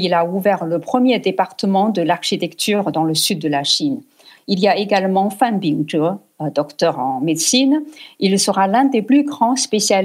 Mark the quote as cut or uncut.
uncut